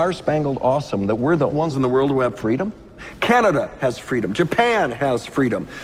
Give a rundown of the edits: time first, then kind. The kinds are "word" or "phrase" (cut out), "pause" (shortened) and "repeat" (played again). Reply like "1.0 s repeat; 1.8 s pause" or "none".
1.5 s word

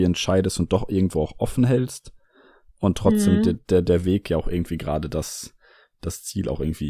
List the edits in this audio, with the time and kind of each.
none

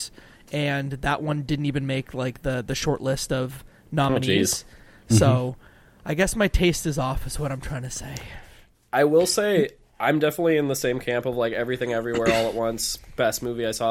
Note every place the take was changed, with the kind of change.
none

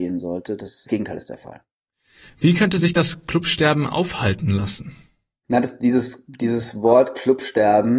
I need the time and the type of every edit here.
none

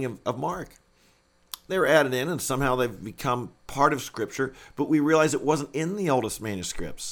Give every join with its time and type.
none

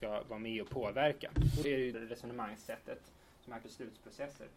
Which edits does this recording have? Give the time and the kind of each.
1.6 s word; 1.9 s word; 3.6 s word

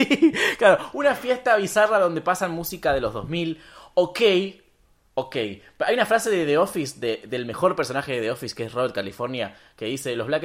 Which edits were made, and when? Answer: none

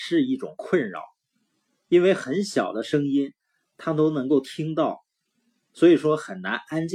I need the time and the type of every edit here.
none

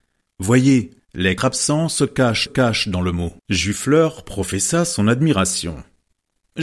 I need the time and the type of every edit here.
1.4 s word; 2.5 s repeat; 3.4 s pause

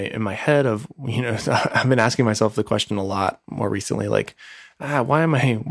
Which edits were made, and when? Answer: none

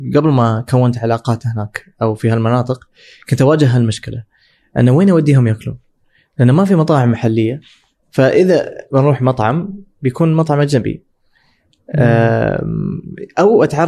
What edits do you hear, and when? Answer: none

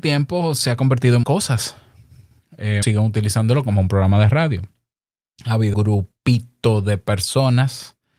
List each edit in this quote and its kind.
1.2 s word; 2.8 s word; 5.7 s word

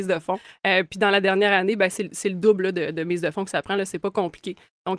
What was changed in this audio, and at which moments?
none

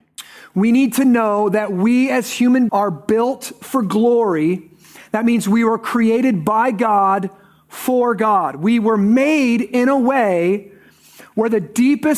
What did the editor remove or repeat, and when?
2.7 s word

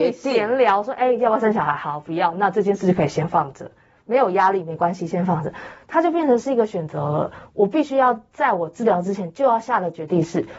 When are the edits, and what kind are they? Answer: none

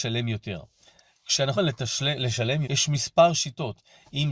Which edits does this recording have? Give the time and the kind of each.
1.5 s word; 2.6 s word

